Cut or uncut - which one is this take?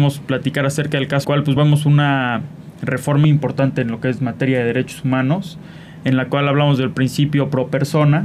cut